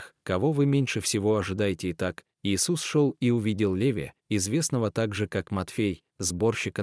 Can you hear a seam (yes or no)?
no